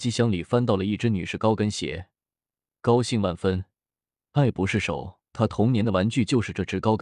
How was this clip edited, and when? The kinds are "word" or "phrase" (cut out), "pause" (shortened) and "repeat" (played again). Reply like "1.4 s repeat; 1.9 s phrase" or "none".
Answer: 5.3 s pause